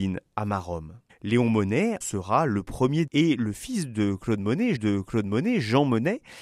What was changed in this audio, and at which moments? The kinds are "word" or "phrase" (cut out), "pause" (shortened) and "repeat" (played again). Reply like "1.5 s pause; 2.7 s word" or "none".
1.1 s pause; 2.0 s word; 3.1 s word; 4.8 s repeat